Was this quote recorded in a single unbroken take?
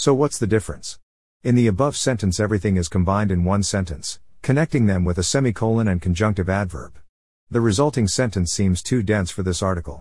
yes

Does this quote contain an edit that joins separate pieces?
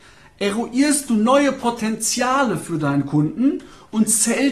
no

